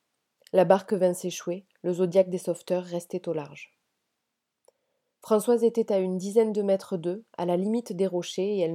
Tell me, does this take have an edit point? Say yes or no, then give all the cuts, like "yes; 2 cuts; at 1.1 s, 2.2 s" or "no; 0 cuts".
no; 0 cuts